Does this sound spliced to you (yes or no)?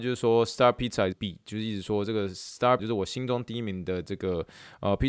yes